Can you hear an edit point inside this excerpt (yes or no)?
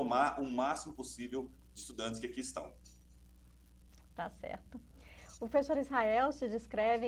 no